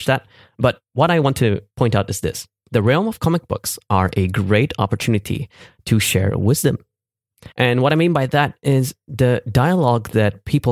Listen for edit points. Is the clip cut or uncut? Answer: cut